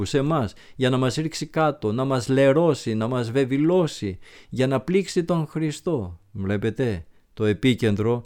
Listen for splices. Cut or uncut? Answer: uncut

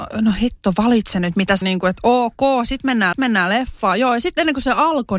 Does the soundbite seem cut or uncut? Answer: cut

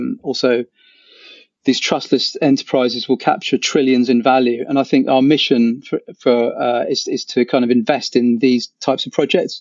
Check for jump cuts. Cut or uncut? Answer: uncut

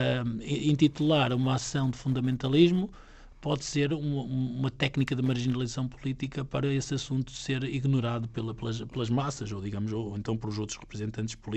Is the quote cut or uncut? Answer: uncut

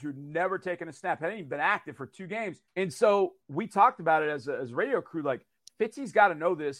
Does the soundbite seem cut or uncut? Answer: cut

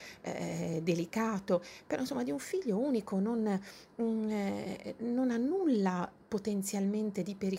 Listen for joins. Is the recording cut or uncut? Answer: uncut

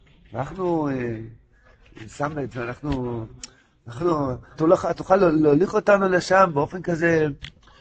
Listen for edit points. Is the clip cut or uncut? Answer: cut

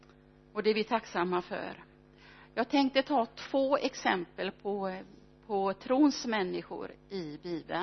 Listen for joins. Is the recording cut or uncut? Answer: cut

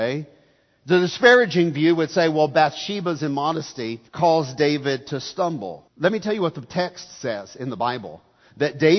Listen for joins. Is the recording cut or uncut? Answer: cut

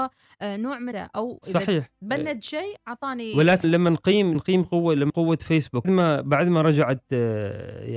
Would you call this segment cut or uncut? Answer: cut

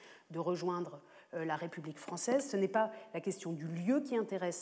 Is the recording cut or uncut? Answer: uncut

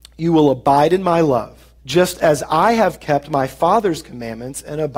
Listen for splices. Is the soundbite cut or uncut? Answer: cut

